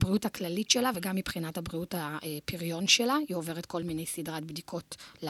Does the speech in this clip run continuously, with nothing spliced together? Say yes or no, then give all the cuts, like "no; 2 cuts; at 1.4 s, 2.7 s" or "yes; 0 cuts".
yes; 0 cuts